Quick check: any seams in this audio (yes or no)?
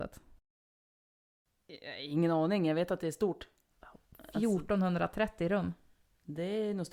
no